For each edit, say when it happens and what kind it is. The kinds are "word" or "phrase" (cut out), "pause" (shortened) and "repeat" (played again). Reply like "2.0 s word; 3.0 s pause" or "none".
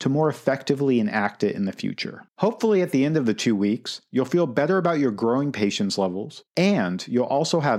2.3 s pause; 6.5 s pause